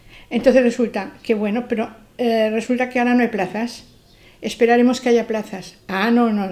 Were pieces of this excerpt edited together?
no; 0 cuts

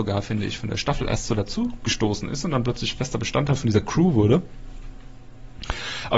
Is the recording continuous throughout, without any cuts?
yes; 0 cuts

